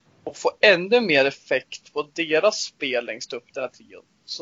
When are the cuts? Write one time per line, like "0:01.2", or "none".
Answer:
none